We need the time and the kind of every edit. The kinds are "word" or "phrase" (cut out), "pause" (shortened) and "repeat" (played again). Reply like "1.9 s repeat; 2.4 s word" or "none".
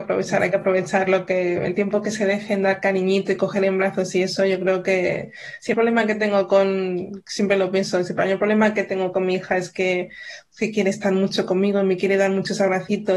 5.7 s word

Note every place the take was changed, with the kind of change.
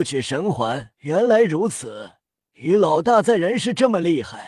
1.0 s pause; 2.3 s pause

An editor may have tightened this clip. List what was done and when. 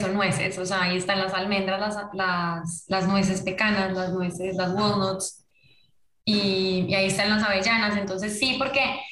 none

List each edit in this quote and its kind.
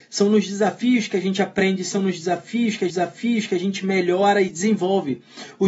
2.9 s repeat; 4.5 s word

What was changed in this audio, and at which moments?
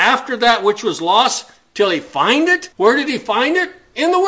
2.7 s pause

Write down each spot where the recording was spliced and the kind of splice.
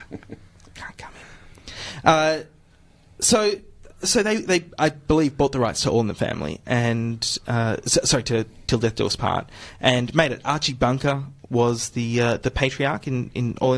none

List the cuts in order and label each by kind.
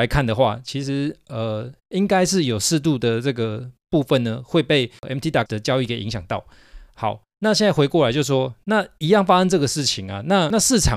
5.5 s word

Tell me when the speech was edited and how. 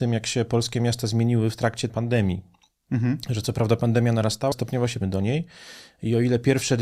1.9 s word; 4.5 s word; 5.0 s word

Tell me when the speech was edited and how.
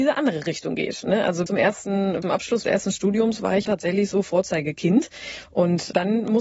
1.5 s word; 2.2 s word; 2.6 s word; 3.7 s word

